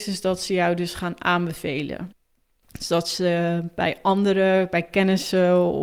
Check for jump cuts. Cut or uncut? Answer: uncut